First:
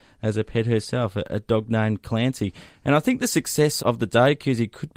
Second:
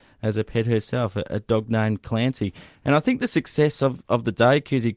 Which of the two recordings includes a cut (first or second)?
first